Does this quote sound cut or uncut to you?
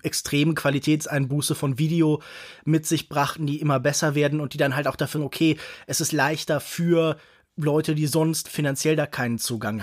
cut